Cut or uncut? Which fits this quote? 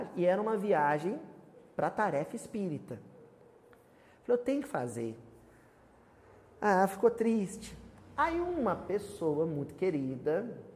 uncut